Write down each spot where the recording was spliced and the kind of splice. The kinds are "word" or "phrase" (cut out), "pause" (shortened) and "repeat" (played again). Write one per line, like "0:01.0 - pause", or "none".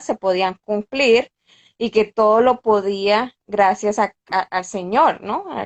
none